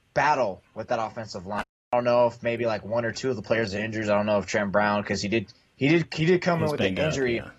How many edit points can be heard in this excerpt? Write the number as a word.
zero